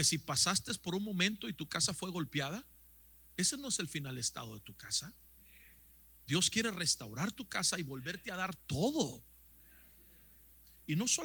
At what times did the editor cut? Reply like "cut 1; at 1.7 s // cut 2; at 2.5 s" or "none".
none